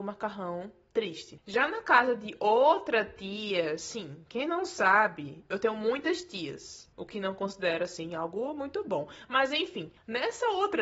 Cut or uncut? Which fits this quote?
uncut